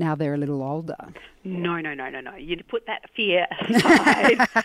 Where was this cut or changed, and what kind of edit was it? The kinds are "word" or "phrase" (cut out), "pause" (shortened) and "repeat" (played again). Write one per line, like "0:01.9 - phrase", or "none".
0:02.6 - word